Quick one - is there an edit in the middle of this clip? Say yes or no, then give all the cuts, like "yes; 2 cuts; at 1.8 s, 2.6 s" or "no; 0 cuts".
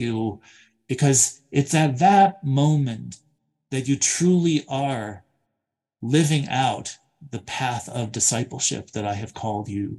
no; 0 cuts